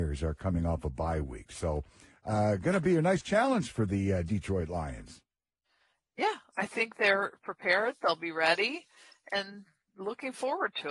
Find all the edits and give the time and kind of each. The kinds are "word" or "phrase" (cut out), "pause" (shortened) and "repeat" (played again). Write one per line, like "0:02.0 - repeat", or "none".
none